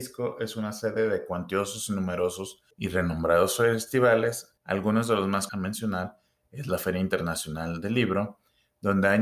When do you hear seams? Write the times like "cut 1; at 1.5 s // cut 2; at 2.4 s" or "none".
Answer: cut 1; at 2.7 s // cut 2; at 4.6 s // cut 3; at 5.5 s